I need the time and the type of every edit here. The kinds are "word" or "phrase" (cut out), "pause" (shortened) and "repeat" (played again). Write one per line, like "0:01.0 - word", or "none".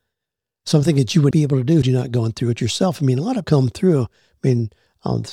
0:01.3 - word
0:01.8 - word
0:03.4 - word